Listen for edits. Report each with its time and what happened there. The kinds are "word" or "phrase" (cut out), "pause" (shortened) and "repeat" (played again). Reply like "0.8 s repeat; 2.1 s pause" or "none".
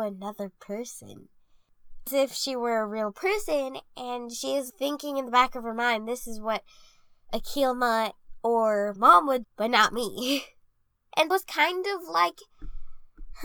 2.1 s word; 4.7 s word; 9.0 s word; 9.4 s word; 11.3 s word